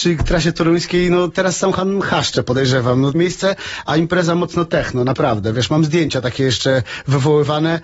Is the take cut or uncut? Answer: cut